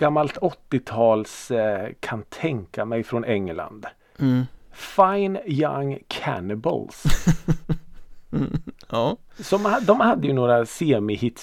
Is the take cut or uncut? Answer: uncut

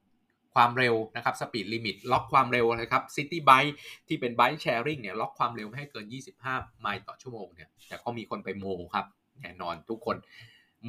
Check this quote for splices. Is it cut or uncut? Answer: cut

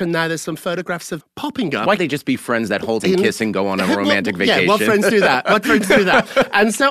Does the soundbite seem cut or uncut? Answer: cut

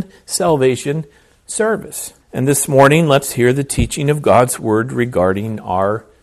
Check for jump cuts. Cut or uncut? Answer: cut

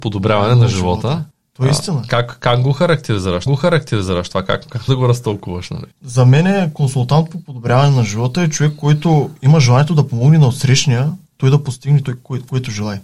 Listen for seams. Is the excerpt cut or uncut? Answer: cut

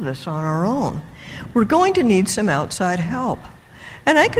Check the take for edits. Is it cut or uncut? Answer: uncut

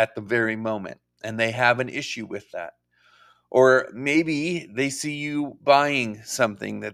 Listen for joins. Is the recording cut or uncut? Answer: uncut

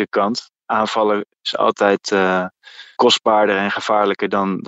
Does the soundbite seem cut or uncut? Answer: cut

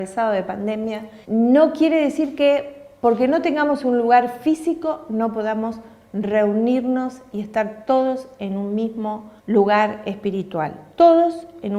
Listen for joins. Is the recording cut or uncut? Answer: cut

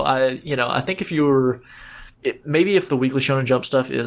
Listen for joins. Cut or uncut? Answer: cut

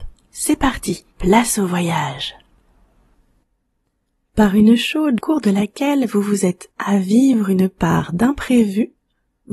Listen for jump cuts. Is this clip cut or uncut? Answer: cut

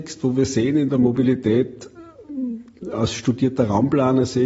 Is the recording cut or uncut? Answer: uncut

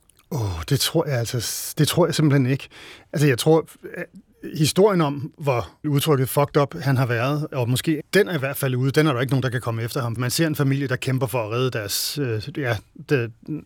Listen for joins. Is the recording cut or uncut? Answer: cut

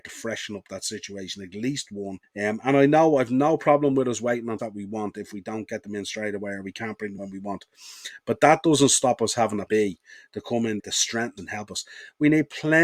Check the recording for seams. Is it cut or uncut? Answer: cut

